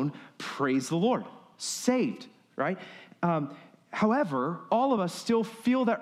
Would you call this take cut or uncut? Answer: uncut